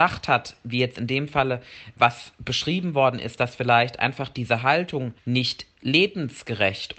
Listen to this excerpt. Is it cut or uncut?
cut